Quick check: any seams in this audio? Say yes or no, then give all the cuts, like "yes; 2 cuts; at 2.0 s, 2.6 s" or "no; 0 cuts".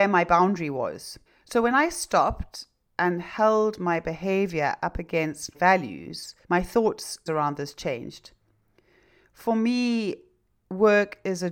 yes; 4 cuts; at 1.3 s, 5.5 s, 6.4 s, 7.3 s